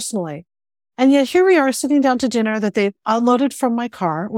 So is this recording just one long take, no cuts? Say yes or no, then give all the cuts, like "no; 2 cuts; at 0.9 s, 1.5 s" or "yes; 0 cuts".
yes; 0 cuts